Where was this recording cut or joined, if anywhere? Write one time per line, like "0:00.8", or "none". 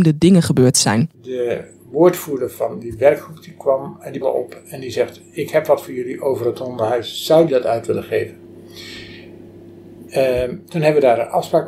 0:01.1
0:04.2
0:07.5
0:10.1